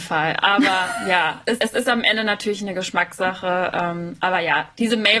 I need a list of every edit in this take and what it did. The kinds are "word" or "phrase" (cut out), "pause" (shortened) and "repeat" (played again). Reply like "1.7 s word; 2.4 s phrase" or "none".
1.6 s word